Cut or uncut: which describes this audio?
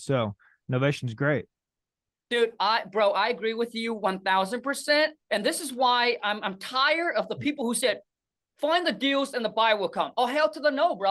cut